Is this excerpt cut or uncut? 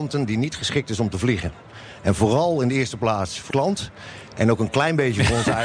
cut